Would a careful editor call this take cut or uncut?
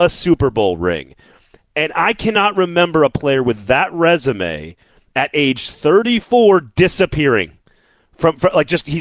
uncut